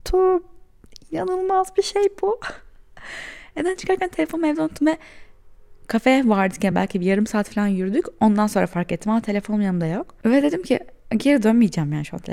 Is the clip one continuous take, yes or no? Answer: yes